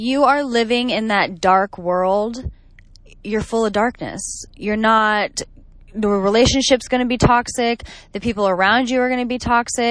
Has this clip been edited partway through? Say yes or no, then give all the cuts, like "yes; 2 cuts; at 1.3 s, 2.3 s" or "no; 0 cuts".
no; 0 cuts